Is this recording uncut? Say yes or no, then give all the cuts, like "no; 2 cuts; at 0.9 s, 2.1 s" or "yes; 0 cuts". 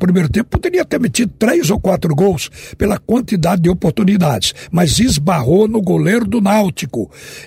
yes; 0 cuts